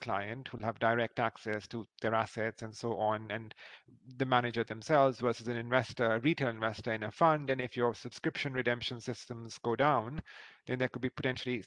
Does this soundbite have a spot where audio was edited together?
no; 0 cuts

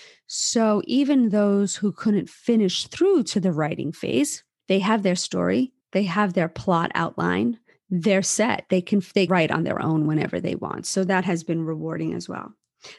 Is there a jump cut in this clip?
yes; 2 cuts; at 5.8 s, 9.3 s

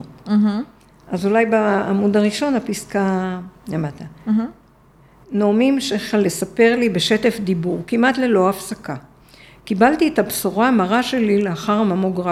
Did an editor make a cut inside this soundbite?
no; 0 cuts

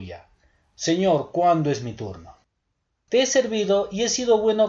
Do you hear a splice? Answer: no; 0 cuts

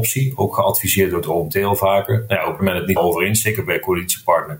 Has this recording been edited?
yes; 2 cuts; at 2.6 s, 3.0 s

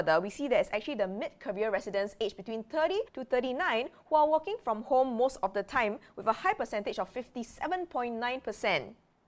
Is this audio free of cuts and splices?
no; 1 cut; at 3.1 s

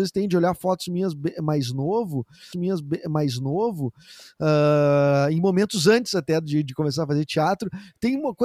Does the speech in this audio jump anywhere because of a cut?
yes; 1 cut; at 2.5 s

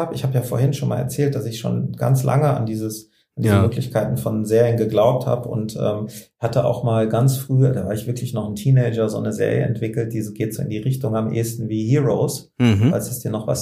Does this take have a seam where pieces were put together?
no; 0 cuts

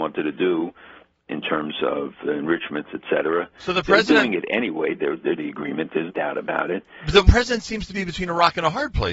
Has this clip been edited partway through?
yes; 4 cuts; at 1.3 s, 5.4 s, 6.1 s, 7.3 s

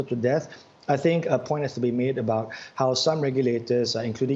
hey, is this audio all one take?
yes; 0 cuts

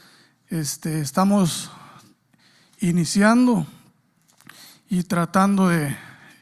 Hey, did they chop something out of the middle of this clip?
no; 0 cuts

